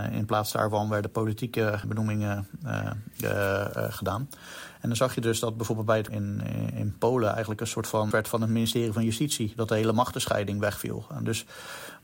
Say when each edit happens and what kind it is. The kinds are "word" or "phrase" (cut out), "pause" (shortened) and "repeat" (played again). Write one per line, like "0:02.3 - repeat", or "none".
0:01.8 - word
0:06.1 - phrase
0:08.1 - word